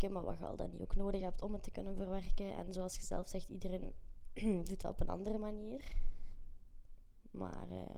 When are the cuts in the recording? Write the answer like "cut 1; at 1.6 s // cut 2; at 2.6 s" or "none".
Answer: none